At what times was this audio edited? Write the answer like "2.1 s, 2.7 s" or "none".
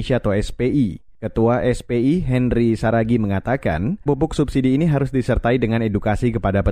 4.1 s